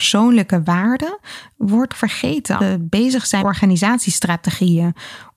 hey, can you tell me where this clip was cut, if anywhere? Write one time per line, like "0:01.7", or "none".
0:01.9
0:02.6
0:03.4